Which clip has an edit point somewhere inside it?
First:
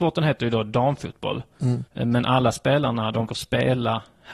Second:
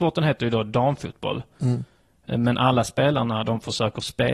first; 2 cuts; at 1.9 s, 3.3 s

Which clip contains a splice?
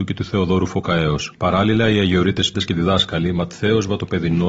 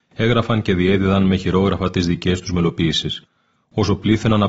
first; 2 cuts; at 1.3 s, 2.5 s

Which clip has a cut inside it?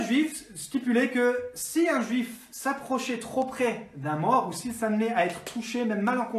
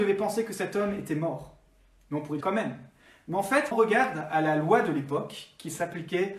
second; 2 cuts; at 2.4 s, 3.7 s

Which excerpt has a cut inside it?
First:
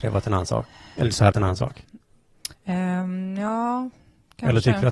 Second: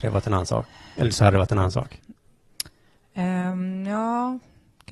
first; 2 cuts; at 1.3 s, 2.5 s

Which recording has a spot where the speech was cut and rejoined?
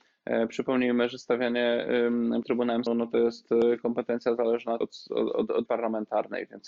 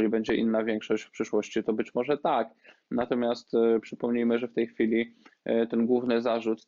first; 4 cuts; at 2.4 s, 2.9 s, 4.8 s, 5.7 s

